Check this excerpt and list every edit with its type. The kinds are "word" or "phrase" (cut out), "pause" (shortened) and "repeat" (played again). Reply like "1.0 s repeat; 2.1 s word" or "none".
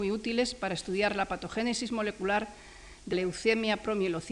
3.1 s word